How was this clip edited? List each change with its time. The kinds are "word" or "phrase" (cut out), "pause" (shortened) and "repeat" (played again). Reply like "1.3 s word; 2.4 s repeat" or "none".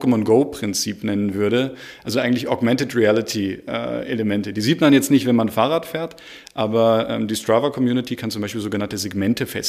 none